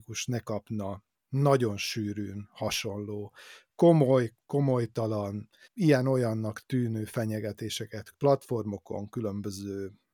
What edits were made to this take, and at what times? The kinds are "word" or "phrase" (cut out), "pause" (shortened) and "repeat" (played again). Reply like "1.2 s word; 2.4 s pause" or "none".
5.6 s pause; 8.1 s word